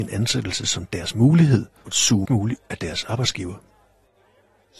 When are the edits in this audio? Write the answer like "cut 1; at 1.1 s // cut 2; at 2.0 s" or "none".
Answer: cut 1; at 1.9 s // cut 2; at 2.3 s // cut 3; at 2.6 s